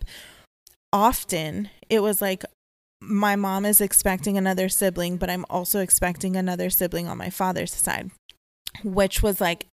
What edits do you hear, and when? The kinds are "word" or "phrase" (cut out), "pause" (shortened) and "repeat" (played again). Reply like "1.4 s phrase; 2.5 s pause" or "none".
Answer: none